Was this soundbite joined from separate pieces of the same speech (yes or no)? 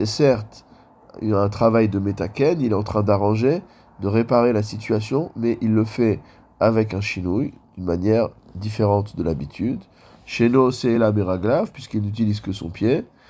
no